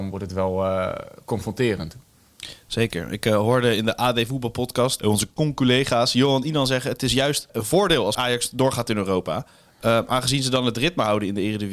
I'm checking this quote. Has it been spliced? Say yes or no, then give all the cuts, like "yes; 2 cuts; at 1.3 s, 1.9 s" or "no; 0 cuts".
no; 0 cuts